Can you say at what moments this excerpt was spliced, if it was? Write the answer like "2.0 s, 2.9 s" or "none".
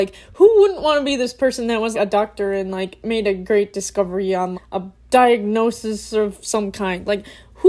1.9 s, 4.5 s, 5.0 s